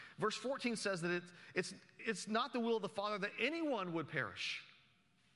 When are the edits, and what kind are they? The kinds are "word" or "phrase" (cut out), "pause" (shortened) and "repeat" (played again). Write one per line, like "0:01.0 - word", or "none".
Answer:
0:02.0 - word